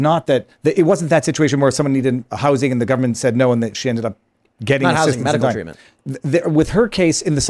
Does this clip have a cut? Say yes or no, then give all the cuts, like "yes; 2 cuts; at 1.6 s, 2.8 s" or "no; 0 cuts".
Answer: no; 0 cuts